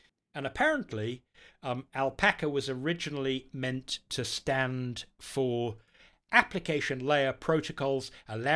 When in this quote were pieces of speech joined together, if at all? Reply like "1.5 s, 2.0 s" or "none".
none